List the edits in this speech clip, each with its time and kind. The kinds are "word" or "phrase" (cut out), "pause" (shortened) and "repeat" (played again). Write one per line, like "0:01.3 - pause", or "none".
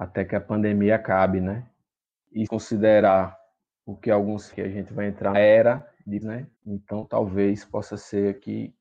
0:02.5 - phrase
0:04.5 - word
0:05.3 - word
0:06.2 - word
0:06.5 - pause